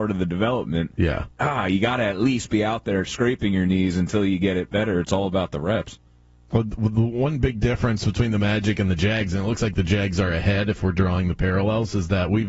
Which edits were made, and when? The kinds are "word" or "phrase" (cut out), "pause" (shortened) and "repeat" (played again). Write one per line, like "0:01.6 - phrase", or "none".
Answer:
0:01.3 - pause